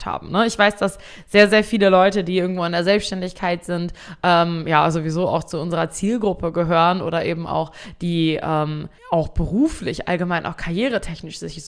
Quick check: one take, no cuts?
no; 1 cut; at 9.0 s

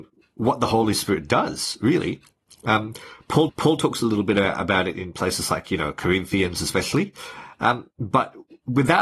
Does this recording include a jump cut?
yes; 1 cut; at 3.5 s

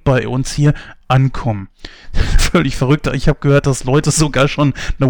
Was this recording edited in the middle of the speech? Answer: no; 0 cuts

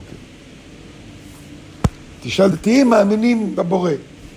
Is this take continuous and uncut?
no; 1 cut; at 2.5 s

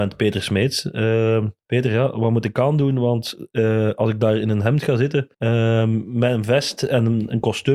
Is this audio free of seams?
no; 2 cuts; at 1.6 s, 5.3 s

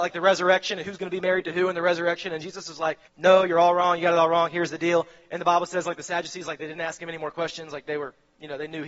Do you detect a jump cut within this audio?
yes; 1 cut; at 3.1 s

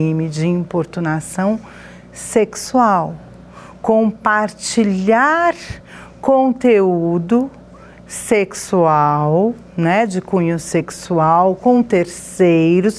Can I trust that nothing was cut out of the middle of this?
yes; 0 cuts

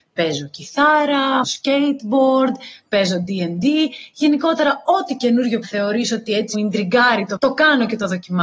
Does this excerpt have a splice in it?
yes; 4 cuts; at 1.4 s, 5.6 s, 6.5 s, 7.4 s

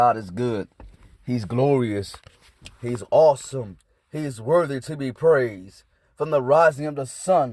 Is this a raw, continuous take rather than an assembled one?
yes; 0 cuts

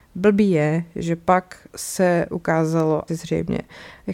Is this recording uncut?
no; 2 cuts; at 1.7 s, 3.1 s

